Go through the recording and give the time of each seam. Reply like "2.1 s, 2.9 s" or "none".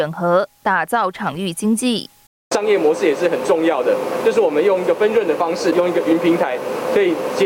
2.3 s